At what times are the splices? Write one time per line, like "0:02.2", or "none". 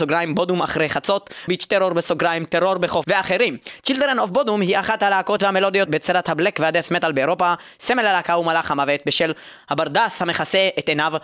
0:01.5
0:03.0
0:05.4
0:05.9